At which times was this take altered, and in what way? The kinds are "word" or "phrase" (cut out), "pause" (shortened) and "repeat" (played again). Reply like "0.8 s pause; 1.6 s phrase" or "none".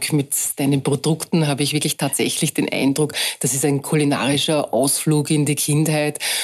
none